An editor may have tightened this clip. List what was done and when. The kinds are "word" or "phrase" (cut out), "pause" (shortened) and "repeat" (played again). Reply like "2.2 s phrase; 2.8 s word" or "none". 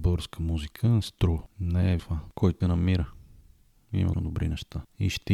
2.0 s word; 2.6 s word; 4.1 s word